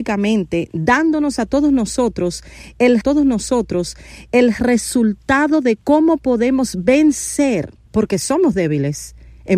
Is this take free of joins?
no; 2 cuts; at 3.0 s, 7.8 s

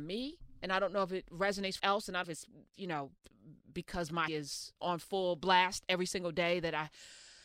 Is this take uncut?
no; 3 cuts; at 1.8 s, 2.2 s, 4.3 s

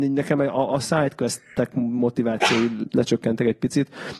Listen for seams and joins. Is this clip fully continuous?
no; 1 cut; at 2.8 s

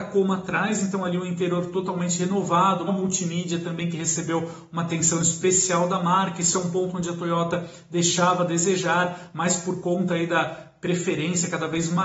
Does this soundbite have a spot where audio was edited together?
yes; 1 cut; at 2.9 s

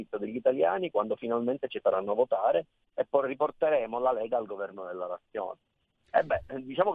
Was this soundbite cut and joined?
no; 0 cuts

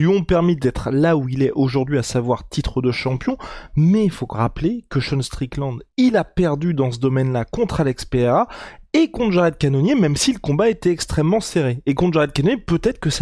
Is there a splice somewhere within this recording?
yes; 1 cut; at 4.3 s

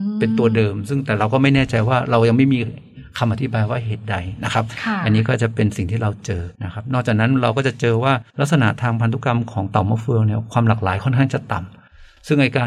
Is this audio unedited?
no; 2 cuts; at 6.5 s, 8.3 s

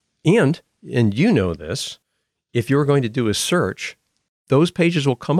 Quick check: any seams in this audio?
no; 0 cuts

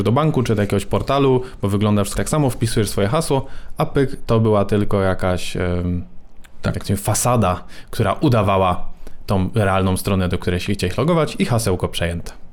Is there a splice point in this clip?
yes; 1 cut; at 2.2 s

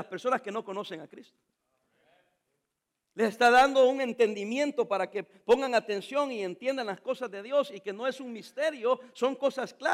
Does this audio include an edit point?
no; 0 cuts

